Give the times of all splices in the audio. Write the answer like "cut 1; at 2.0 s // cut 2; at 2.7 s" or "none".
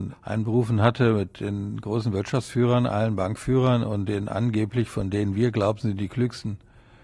none